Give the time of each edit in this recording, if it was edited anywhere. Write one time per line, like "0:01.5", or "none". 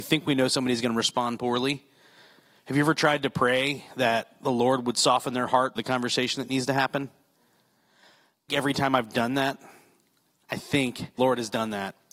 0:05.8
0:08.5
0:11.2